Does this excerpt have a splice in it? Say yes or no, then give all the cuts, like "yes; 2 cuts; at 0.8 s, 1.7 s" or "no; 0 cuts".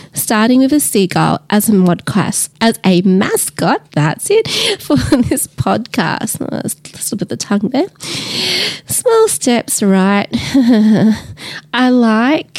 yes; 2 cuts; at 2.5 s, 3.9 s